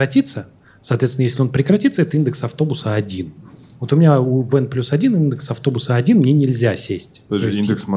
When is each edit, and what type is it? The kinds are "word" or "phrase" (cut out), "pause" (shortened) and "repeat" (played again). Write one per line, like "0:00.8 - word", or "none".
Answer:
none